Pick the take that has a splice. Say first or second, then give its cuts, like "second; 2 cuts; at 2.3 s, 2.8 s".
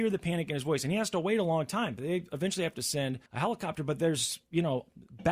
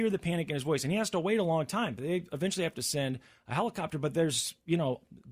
first; 1 cut; at 3.3 s